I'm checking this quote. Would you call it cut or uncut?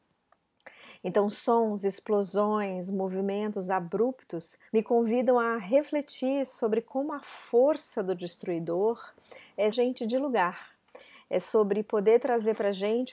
cut